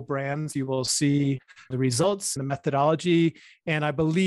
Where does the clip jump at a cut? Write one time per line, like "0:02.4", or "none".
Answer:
0:01.7
0:02.4